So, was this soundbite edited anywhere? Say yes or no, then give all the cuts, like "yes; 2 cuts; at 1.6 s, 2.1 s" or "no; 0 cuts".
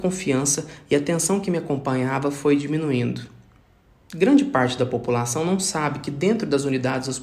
no; 0 cuts